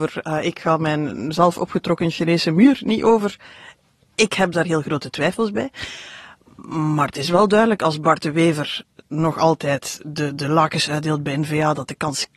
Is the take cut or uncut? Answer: uncut